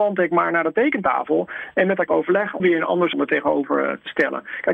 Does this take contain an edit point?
yes; 3 cuts; at 2.1 s, 2.6 s, 3.1 s

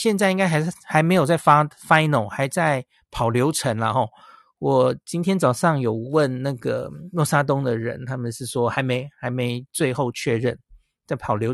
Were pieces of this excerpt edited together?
no; 0 cuts

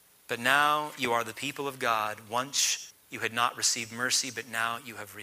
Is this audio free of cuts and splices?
no; 1 cut; at 2.9 s

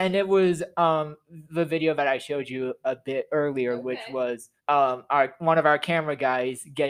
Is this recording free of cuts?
no; 1 cut; at 4.6 s

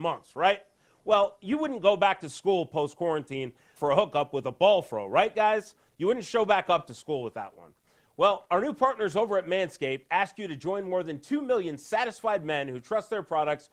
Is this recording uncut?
no; 1 cut; at 3.8 s

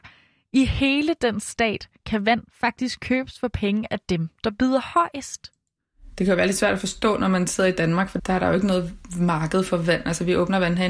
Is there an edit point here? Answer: no; 0 cuts

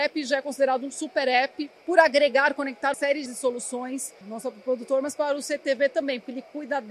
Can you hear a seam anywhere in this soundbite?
yes; 4 cuts; at 1.8 s, 2.9 s, 3.3 s, 4.2 s

